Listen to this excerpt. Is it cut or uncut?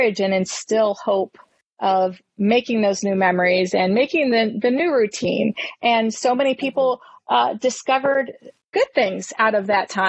uncut